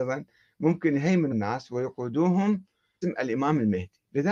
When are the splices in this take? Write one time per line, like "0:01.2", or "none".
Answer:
0:01.3
0:03.0